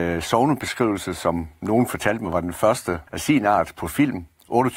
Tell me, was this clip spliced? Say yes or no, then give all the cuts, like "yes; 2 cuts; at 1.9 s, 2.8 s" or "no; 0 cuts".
yes; 1 cut; at 3.1 s